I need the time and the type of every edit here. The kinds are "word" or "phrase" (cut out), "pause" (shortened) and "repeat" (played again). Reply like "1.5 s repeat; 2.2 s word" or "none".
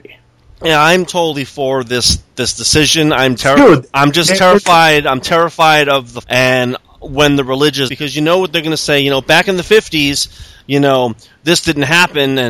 3.4 s word; 6.2 s word; 7.9 s phrase

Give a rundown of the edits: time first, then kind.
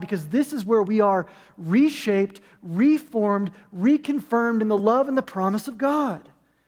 none

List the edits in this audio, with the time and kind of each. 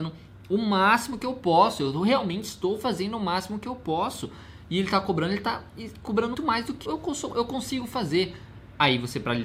6.3 s word; 6.9 s word

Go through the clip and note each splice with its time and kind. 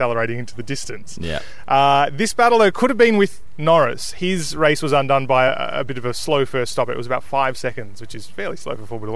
none

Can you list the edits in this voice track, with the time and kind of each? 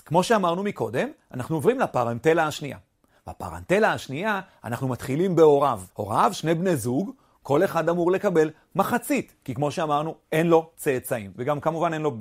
5.9 s pause

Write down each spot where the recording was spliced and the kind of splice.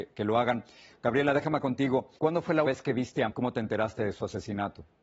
1.6 s word; 2.2 s pause; 2.6 s word; 3.3 s word

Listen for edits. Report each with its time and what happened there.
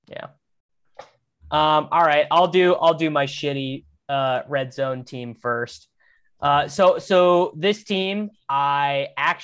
none

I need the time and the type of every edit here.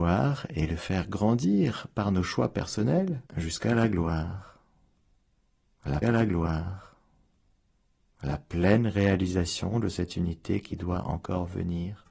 3.3 s pause; 6.0 s repeat

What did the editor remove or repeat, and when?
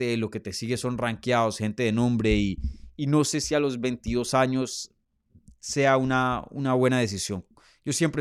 none

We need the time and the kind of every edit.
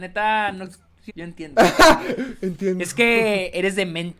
1.1 s word

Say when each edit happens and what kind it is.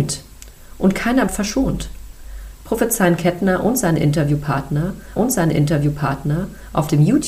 1.3 s word; 5.2 s repeat

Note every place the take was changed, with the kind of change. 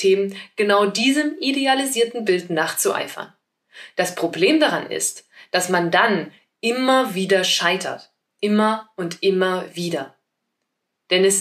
none

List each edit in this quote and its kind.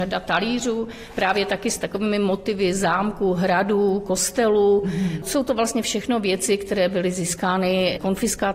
none

